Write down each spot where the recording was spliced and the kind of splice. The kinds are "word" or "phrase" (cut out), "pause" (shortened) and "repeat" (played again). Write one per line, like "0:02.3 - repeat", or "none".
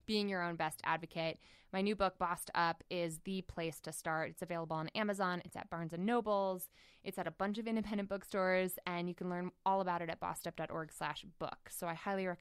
none